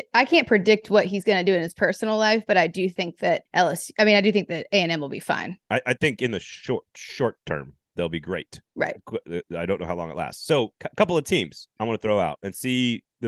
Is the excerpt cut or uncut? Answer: cut